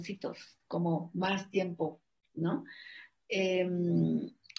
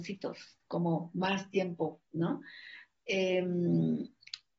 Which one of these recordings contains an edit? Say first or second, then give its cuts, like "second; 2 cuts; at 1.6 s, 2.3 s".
second; 1 cut; at 2.1 s